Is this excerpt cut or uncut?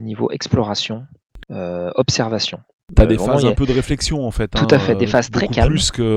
uncut